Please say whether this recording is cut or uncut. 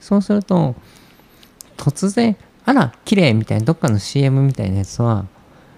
uncut